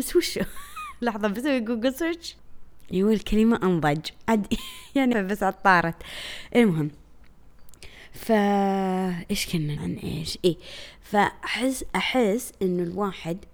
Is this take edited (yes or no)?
yes